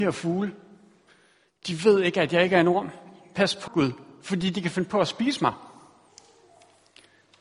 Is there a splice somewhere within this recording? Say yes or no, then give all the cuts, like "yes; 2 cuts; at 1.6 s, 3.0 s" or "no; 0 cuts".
yes; 1 cut; at 3.7 s